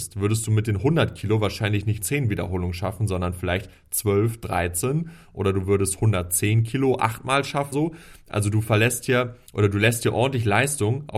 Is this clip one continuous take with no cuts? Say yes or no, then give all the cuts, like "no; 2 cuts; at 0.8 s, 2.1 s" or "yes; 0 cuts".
no; 3 cuts; at 2.0 s, 7.7 s, 9.5 s